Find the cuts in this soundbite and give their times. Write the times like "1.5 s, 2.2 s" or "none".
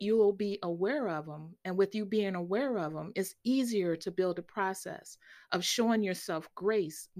none